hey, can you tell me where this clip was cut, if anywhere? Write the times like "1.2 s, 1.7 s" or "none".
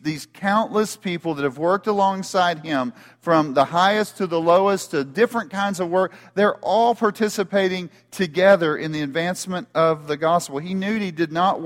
none